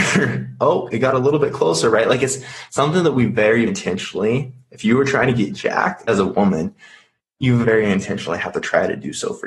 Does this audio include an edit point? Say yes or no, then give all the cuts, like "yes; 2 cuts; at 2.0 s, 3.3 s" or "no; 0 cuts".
yes; 3 cuts; at 3.7 s, 6.1 s, 7.6 s